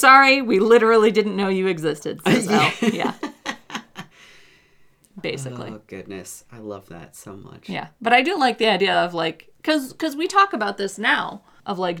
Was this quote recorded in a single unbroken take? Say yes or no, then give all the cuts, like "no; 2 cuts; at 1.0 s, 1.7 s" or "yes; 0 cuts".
yes; 0 cuts